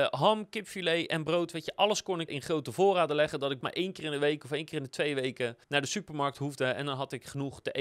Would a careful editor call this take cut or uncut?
cut